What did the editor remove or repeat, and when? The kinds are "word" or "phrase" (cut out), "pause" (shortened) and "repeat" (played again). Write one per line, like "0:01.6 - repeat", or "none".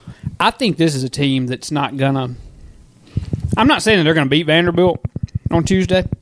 none